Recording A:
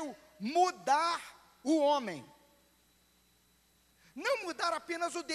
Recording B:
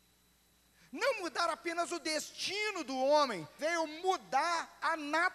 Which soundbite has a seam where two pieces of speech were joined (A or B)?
B